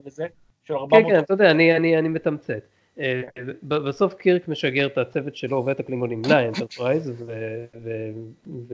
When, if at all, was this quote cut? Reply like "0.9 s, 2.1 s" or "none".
none